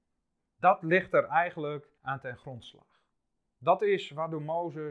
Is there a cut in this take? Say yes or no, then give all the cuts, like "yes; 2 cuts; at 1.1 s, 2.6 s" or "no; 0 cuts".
yes; 1 cut; at 2.0 s